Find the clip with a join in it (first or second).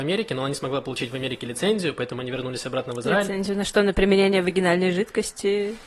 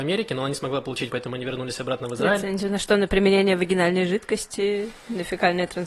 second